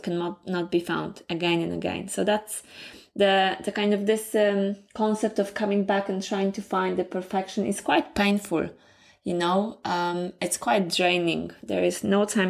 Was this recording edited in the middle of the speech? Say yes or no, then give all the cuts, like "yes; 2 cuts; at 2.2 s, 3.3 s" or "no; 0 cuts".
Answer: no; 0 cuts